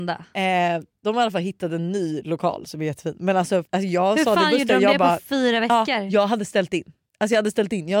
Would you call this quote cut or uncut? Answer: cut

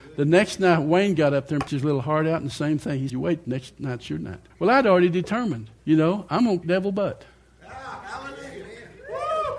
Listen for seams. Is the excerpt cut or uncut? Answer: cut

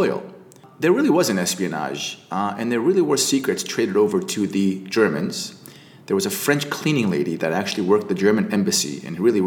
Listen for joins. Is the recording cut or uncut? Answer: uncut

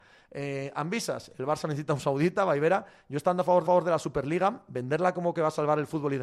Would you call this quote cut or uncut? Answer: cut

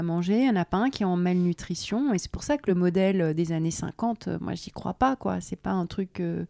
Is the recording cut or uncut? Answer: uncut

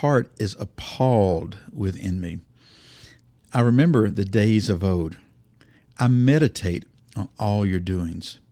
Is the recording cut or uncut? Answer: uncut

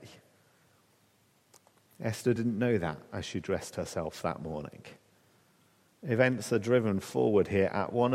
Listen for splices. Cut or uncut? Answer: uncut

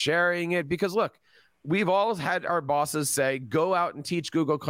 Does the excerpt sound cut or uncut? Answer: uncut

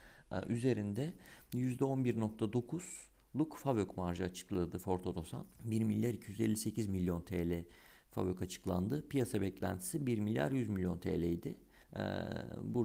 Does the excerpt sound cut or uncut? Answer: cut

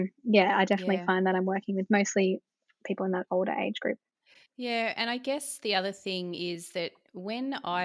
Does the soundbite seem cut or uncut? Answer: uncut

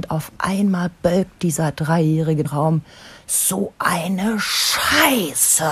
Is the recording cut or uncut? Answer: cut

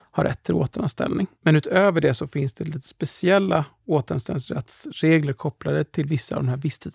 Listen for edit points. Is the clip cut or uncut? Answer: cut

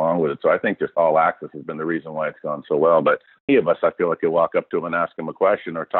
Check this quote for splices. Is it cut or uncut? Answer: cut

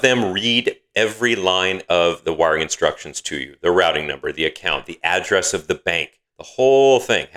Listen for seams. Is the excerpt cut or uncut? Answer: cut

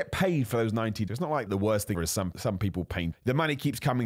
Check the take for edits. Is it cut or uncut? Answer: cut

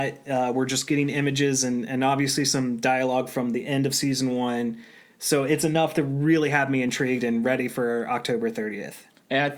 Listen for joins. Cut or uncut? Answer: uncut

